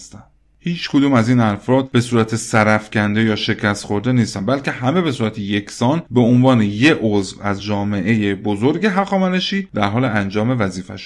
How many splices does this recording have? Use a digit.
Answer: 0